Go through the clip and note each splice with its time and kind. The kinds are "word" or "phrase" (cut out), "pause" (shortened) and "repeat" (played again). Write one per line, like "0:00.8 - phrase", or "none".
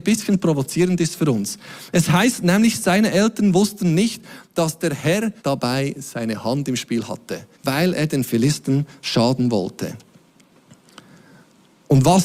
0:05.4 - pause
0:07.5 - pause